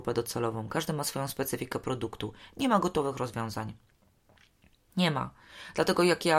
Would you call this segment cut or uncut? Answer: uncut